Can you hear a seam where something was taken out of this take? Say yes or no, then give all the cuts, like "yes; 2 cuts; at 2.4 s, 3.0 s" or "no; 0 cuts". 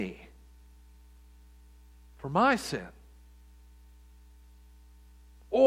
no; 0 cuts